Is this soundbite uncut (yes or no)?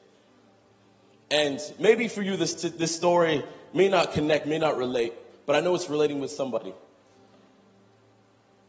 yes